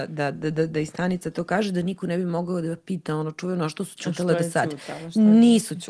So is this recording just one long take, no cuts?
yes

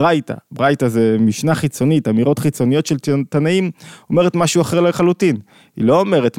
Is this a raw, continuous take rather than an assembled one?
yes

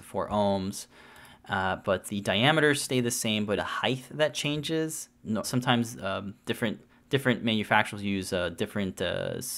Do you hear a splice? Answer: yes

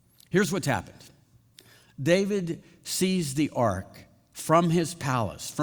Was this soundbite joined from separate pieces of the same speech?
no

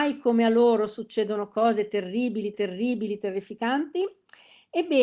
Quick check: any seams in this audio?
yes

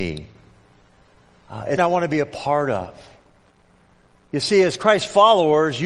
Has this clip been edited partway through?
yes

